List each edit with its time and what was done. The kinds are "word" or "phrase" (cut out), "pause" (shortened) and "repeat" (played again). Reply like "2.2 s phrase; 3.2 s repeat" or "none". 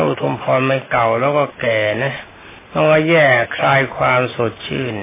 2.6 s pause

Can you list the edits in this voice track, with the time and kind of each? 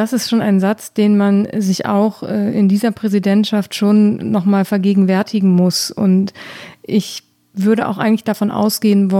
none

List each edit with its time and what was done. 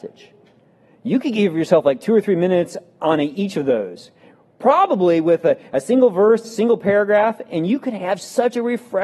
none

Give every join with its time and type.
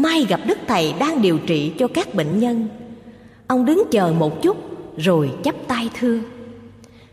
none

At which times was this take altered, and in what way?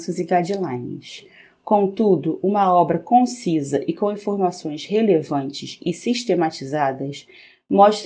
none

